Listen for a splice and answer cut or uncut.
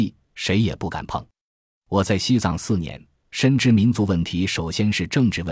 uncut